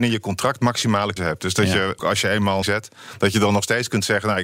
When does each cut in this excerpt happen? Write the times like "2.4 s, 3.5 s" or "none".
1.2 s, 2.0 s, 2.6 s